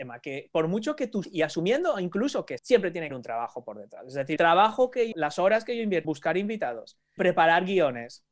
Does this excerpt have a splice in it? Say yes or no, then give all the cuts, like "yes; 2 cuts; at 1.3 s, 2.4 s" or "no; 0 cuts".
yes; 7 cuts; at 1.2 s, 2.6 s, 3.1 s, 4.4 s, 5.1 s, 6.0 s, 7.2 s